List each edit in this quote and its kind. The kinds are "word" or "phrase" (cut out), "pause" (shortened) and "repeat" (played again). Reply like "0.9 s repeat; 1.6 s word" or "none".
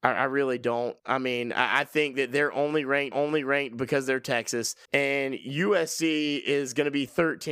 1.0 s pause; 3.1 s repeat; 4.8 s pause